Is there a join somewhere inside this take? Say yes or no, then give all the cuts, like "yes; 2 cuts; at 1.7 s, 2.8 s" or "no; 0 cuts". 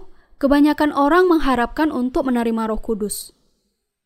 no; 0 cuts